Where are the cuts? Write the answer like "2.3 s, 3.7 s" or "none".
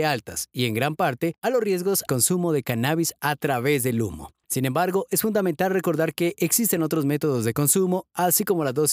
2.1 s